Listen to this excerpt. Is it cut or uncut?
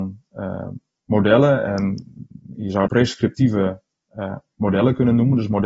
cut